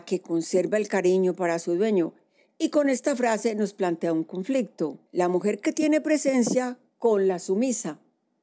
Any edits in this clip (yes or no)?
yes